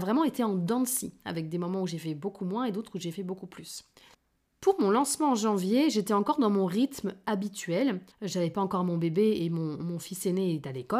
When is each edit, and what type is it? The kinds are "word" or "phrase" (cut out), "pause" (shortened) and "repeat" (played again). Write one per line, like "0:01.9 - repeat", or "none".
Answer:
0:04.1 - pause
0:08.1 - pause